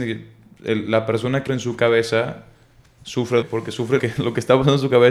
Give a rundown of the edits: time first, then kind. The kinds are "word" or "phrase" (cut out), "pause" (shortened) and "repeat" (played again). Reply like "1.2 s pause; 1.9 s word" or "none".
1.5 s word; 3.4 s word; 4.0 s word